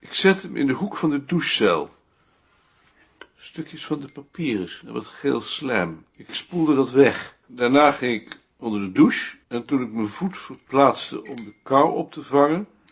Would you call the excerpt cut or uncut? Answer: cut